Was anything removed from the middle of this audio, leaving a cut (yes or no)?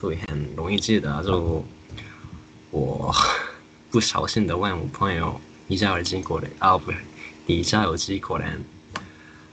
no